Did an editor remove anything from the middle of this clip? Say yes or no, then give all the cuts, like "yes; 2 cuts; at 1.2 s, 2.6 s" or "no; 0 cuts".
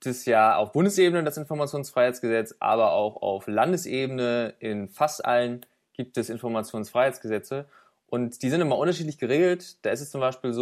no; 0 cuts